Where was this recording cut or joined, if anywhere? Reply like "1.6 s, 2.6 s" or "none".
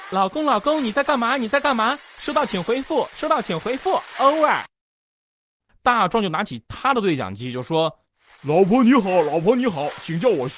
8.1 s